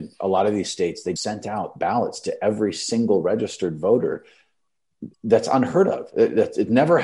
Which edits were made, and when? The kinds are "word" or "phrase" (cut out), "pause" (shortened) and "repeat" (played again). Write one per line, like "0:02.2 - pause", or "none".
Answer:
0:01.2 - word
0:05.1 - pause